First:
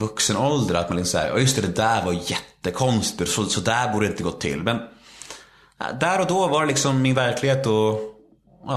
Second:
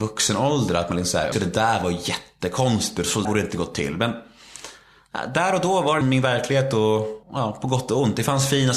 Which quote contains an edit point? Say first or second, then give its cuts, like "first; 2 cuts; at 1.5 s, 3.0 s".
second; 4 cuts; at 1.3 s, 3.2 s, 6.0 s, 7.2 s